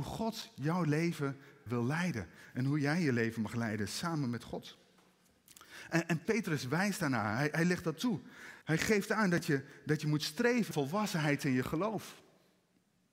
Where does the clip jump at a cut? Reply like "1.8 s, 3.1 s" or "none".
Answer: 1.7 s, 6.2 s, 8.6 s, 10.7 s